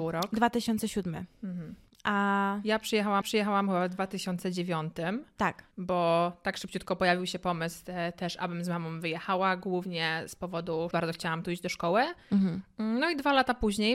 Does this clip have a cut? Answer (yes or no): yes